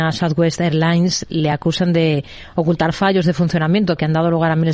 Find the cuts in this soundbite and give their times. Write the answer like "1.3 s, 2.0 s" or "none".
none